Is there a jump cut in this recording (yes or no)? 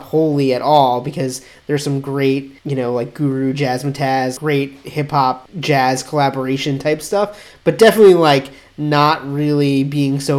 no